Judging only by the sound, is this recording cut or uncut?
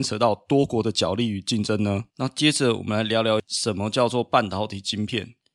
cut